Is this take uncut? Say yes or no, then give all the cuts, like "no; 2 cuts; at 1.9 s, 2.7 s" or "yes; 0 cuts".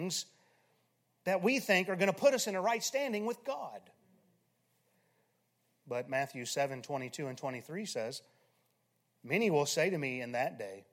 yes; 0 cuts